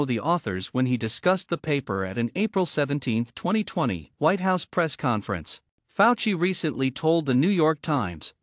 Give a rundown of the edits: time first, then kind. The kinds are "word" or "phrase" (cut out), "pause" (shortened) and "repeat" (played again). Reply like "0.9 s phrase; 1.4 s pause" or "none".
4.1 s pause; 5.8 s pause